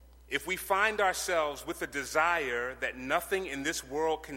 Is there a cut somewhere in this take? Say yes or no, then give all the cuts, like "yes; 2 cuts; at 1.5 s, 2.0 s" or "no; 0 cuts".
no; 0 cuts